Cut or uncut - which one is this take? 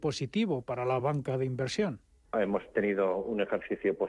uncut